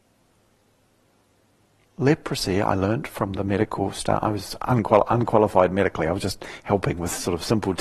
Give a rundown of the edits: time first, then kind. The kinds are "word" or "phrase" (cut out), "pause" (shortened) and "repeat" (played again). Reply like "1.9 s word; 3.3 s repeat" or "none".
none